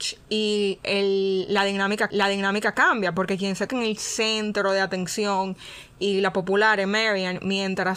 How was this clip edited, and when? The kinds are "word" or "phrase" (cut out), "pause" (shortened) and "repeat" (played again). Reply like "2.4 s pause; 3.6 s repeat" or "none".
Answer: 2.1 s repeat; 3.7 s phrase